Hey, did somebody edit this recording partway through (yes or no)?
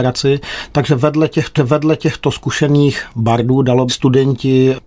yes